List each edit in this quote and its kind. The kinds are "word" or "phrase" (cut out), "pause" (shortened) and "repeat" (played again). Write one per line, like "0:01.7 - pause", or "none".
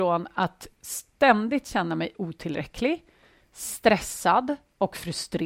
none